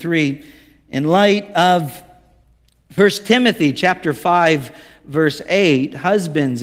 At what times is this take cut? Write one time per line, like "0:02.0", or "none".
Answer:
none